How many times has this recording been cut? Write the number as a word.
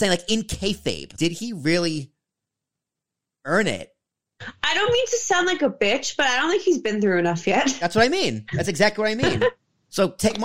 one